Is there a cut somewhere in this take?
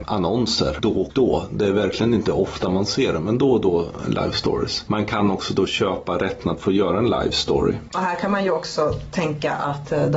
no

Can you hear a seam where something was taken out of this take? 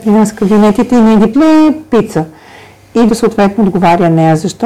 yes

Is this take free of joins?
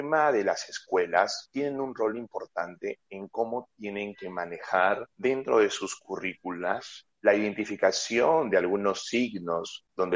yes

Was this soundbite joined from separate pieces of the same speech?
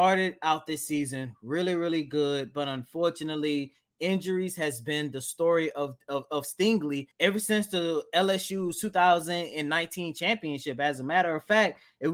yes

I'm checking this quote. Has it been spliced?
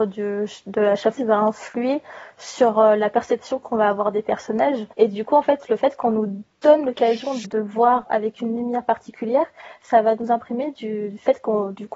yes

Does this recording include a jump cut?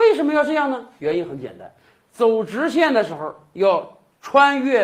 no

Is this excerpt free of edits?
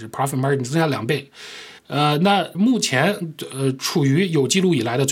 no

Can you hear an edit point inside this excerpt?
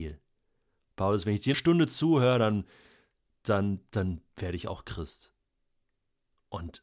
yes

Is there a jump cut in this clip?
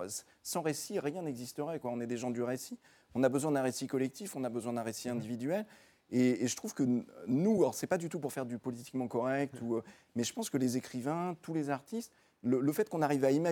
no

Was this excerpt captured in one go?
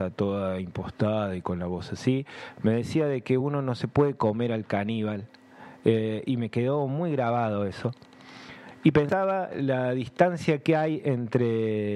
yes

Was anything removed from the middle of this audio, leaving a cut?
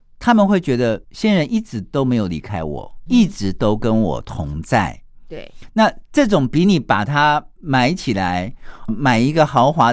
yes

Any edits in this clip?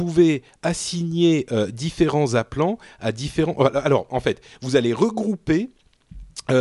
no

